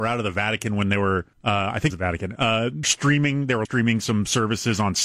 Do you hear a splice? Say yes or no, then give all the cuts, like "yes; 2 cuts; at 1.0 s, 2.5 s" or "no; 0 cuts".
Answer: yes; 4 cuts; at 1.3 s, 1.9 s, 2.8 s, 3.7 s